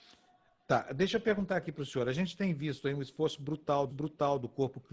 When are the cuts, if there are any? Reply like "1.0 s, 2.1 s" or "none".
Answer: 3.9 s